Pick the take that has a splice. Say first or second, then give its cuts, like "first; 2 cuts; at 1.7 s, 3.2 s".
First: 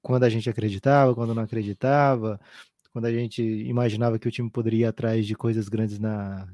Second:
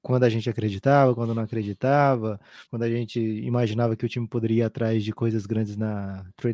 second; 1 cut; at 2.7 s